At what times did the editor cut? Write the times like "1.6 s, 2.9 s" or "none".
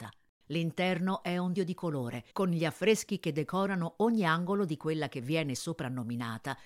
1.6 s, 2.3 s